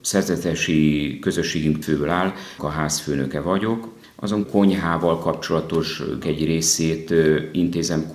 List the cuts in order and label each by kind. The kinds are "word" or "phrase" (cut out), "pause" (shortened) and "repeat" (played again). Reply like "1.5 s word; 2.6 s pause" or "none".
1.8 s word; 2.6 s word; 4.4 s word; 6.2 s word